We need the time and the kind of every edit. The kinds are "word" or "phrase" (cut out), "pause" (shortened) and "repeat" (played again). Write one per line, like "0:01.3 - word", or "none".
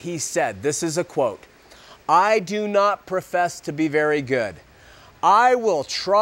none